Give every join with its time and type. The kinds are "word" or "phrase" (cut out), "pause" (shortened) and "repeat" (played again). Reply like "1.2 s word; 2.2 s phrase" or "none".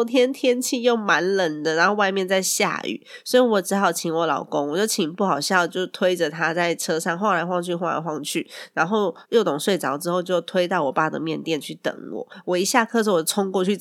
9.2 s pause